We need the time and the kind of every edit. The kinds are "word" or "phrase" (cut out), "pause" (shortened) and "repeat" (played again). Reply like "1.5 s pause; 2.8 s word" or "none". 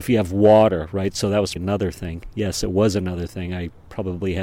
1.6 s word